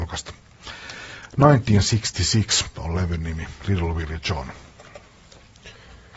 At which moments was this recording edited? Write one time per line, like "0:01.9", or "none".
none